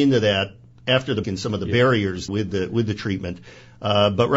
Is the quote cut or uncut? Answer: cut